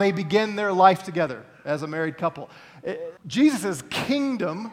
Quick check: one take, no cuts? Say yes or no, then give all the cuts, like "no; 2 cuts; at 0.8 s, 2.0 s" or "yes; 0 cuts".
no; 1 cut; at 3.2 s